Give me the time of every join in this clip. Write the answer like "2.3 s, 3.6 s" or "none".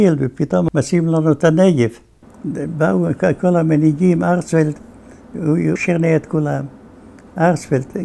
5.8 s